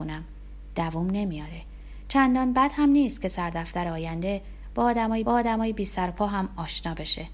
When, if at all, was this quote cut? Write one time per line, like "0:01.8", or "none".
0:05.3